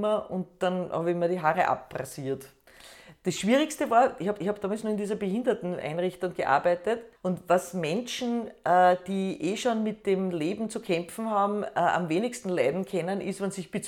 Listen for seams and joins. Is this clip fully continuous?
no; 2 cuts; at 4.4 s, 7.2 s

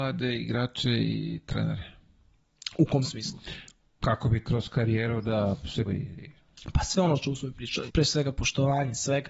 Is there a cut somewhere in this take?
yes; 4 cuts; at 4.0 s, 4.4 s, 5.8 s, 7.9 s

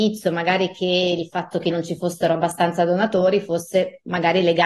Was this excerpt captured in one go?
no; 1 cut; at 1.7 s

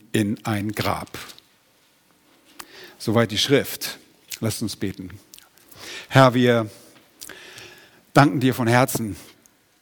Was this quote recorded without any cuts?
no; 1 cut; at 7.9 s

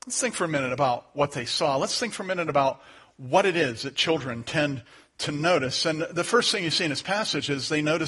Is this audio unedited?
yes; 0 cuts

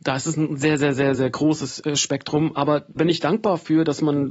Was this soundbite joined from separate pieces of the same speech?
yes; 2 cuts; at 1.1 s, 3.0 s

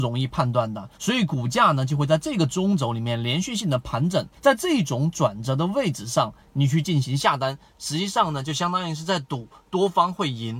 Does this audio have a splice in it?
yes; 2 cuts; at 0.9 s, 4.4 s

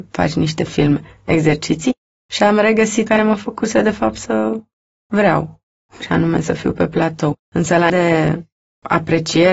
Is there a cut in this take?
yes; 3 cuts; at 3.1 s, 7.4 s, 7.9 s

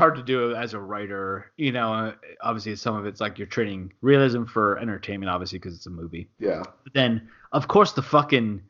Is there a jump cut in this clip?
yes; 3 cuts; at 2.3 s, 4.0 s, 6.3 s

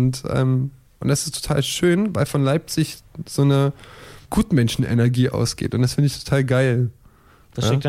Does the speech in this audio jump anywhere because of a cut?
no; 0 cuts

